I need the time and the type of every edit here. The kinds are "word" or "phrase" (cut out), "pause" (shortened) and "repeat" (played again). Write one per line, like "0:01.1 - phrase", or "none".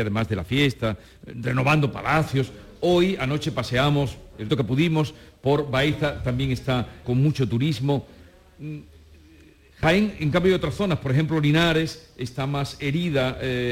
0:04.5 - word
0:07.0 - word